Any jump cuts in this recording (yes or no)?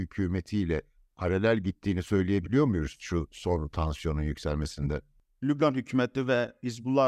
no